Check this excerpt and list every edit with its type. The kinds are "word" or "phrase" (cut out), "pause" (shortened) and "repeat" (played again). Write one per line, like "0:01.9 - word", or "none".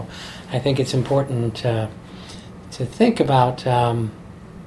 none